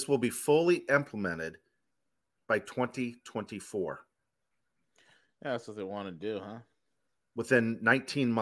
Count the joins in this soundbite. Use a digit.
1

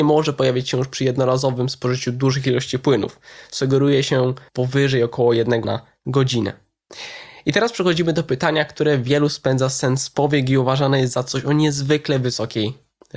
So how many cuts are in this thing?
2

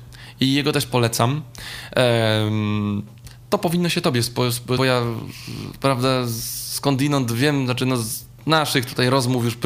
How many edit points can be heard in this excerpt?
1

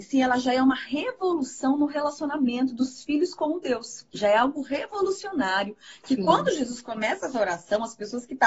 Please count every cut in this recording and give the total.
1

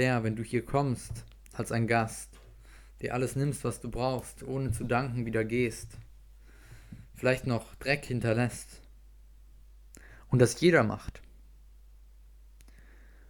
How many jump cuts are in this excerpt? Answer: 0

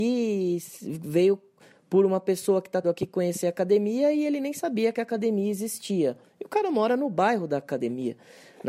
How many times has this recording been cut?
1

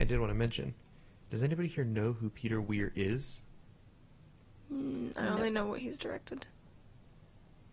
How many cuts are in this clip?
0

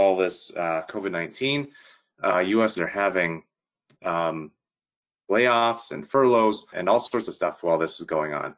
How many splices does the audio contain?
2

